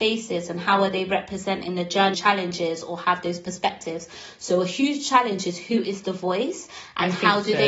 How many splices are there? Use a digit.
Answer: 1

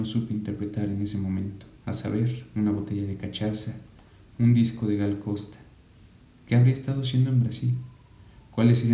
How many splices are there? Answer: 1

